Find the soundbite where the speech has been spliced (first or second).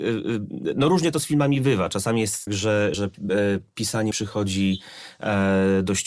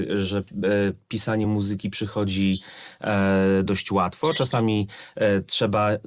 first